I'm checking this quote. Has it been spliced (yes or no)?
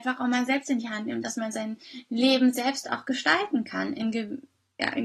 no